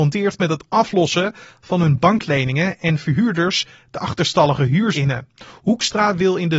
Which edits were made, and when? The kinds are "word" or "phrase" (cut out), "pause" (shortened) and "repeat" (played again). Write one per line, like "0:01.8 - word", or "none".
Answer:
0:04.9 - word